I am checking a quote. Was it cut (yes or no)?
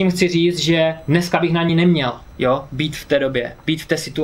no